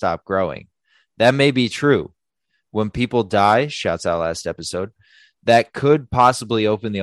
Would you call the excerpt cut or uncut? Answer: uncut